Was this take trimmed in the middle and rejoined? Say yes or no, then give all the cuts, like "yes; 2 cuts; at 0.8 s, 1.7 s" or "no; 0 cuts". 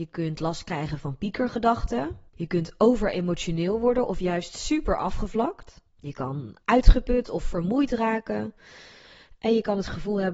yes; 2 cuts; at 2.3 s, 5.9 s